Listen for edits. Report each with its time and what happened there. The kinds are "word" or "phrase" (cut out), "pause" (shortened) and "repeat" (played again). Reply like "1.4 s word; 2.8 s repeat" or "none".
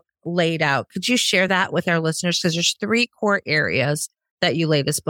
none